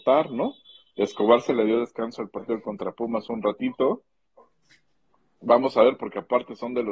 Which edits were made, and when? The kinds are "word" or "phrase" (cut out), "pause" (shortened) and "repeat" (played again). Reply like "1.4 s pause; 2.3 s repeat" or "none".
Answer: none